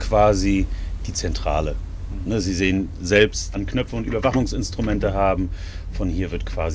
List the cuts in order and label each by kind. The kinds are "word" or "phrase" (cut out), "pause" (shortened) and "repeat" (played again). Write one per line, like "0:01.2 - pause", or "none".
0:03.5 - phrase